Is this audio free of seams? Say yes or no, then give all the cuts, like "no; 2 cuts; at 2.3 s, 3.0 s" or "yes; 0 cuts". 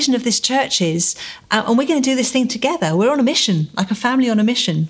yes; 0 cuts